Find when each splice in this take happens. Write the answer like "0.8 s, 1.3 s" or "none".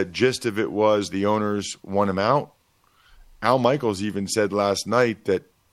none